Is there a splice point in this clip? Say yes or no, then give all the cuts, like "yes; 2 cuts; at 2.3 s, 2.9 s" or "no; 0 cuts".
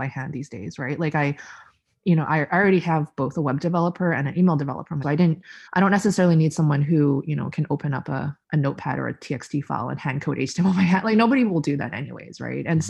yes; 3 cuts; at 5.0 s, 5.7 s, 8.4 s